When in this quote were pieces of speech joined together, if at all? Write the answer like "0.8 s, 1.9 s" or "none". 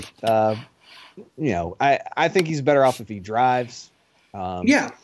1.3 s

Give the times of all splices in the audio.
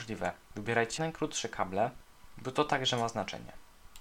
1.0 s

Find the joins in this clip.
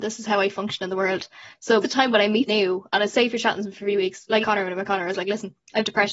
1.8 s, 2.5 s, 4.4 s

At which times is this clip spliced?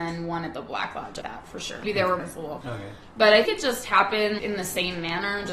1.2 s, 1.8 s, 2.2 s, 2.6 s, 3.5 s, 4.4 s

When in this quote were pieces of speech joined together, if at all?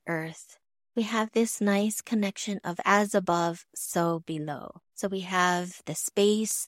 4.9 s

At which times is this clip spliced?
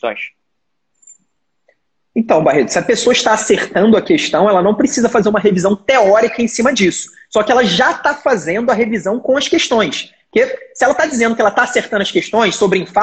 none

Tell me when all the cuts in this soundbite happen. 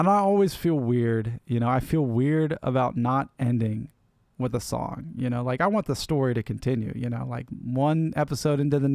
none

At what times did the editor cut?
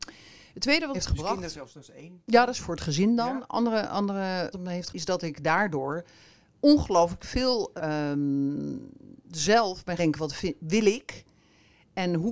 0.9 s, 1.7 s, 2.6 s, 4.5 s, 4.9 s, 7.8 s, 10.0 s

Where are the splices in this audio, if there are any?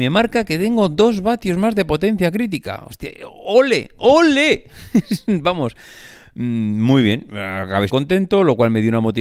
7.9 s

